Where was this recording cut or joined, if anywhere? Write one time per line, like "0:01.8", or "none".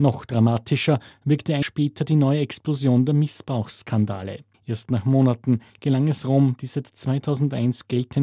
0:01.6
0:04.5